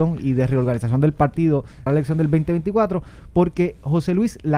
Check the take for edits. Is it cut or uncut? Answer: cut